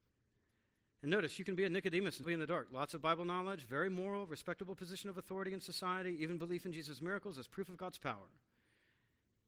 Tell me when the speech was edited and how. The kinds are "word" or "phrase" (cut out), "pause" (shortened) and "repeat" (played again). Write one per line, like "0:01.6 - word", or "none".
0:02.2 - word